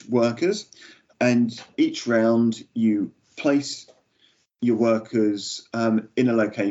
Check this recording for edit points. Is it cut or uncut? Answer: uncut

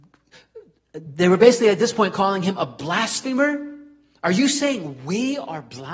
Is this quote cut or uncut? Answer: uncut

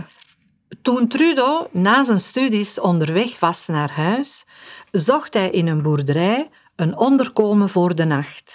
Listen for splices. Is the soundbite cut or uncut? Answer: uncut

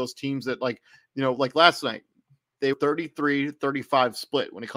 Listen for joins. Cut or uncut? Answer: cut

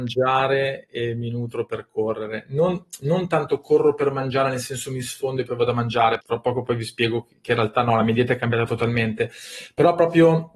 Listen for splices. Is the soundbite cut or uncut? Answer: cut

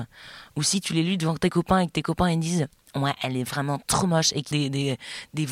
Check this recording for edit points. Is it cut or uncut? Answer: cut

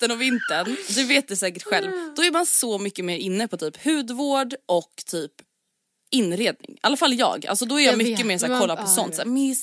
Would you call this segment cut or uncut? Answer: uncut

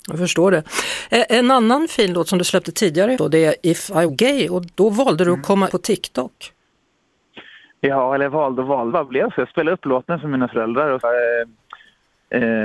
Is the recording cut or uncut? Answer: cut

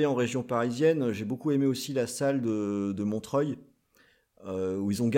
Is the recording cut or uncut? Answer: uncut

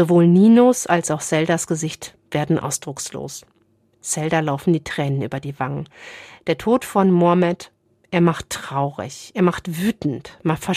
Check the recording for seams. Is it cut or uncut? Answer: uncut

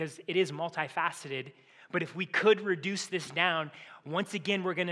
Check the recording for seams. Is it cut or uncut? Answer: uncut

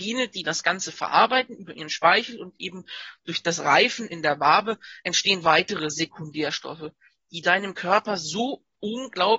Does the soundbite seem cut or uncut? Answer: uncut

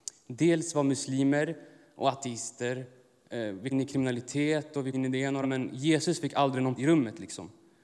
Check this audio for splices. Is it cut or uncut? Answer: cut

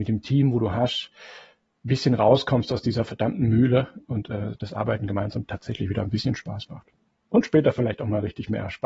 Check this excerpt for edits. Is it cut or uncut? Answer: uncut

